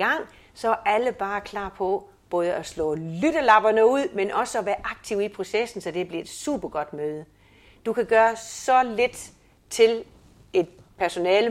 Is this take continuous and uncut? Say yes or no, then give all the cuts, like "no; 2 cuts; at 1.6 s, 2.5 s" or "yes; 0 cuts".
yes; 0 cuts